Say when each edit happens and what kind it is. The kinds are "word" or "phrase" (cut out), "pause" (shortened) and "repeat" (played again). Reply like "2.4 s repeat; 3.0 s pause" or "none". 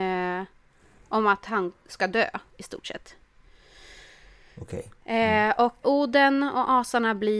5.8 s word